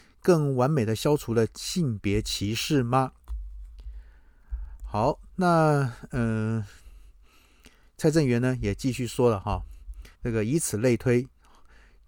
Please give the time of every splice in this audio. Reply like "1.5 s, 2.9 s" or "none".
10.1 s